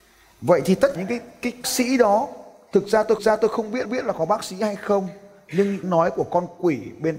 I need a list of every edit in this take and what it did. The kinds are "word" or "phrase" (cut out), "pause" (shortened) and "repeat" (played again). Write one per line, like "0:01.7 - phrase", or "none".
0:01.0 - word
0:01.6 - word
0:03.2 - repeat
0:03.8 - repeat
0:05.8 - phrase